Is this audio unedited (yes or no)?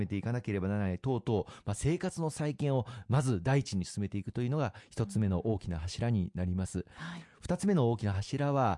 yes